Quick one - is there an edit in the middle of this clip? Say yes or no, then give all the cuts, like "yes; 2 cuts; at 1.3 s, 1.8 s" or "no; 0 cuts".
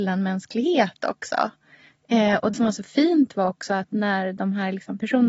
yes; 1 cut; at 2.5 s